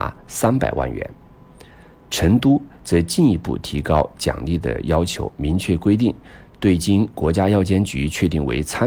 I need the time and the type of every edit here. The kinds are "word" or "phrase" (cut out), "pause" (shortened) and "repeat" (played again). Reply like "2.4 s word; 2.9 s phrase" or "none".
none